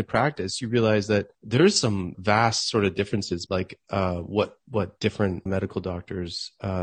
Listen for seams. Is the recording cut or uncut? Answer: cut